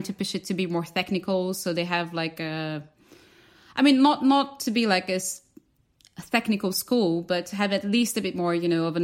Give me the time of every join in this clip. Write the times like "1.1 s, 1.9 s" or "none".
none

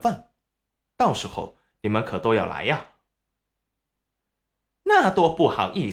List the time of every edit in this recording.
none

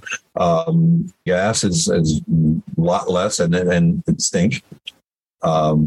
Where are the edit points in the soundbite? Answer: 1.3 s, 4.2 s

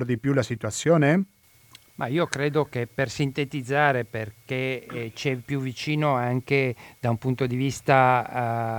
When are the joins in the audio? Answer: none

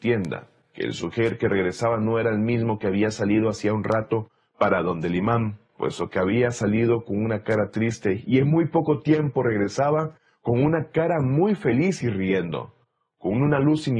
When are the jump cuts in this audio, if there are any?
none

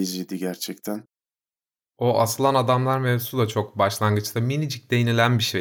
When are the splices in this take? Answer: none

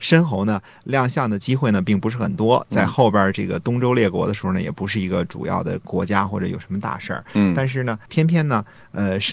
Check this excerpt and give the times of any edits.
8.1 s

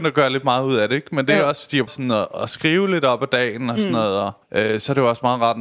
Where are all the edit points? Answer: 1.9 s, 4.4 s

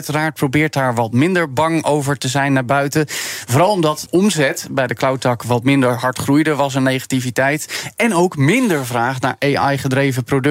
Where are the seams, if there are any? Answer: 4.1 s

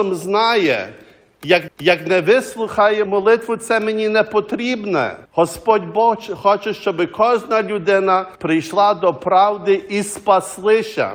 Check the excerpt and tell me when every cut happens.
1.7 s, 3.1 s, 5.3 s, 8.4 s

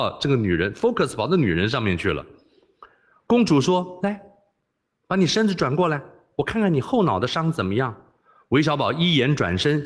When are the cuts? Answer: none

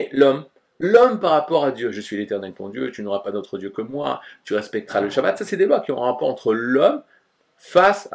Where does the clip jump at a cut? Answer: none

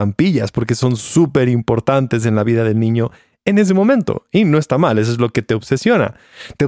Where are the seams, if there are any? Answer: none

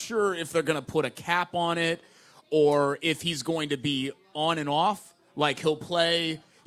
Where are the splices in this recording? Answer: none

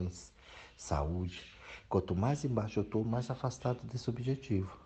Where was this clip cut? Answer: none

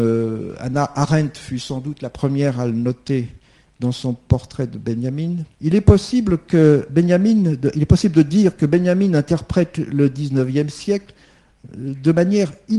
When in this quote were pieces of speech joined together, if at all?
5.5 s

